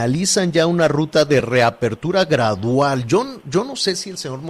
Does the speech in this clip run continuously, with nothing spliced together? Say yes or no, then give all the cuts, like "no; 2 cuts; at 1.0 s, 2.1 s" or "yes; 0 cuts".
yes; 0 cuts